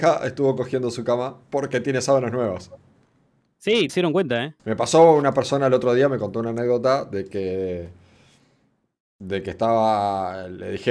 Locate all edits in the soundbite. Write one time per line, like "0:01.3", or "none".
0:01.4
0:03.9
0:04.6